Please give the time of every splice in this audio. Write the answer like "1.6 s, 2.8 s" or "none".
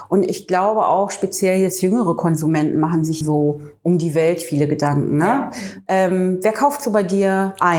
3.2 s